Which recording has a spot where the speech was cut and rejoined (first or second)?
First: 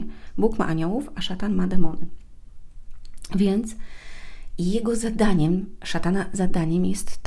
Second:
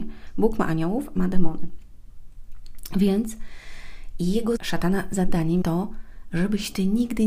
second